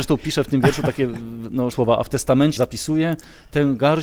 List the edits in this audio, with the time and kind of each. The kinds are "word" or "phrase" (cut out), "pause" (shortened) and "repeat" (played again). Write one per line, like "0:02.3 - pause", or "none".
0:01.7 - word
0:02.6 - word